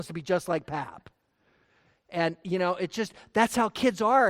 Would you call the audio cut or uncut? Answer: uncut